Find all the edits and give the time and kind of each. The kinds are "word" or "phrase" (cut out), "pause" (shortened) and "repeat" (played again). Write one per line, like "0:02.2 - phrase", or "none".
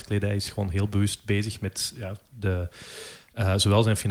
none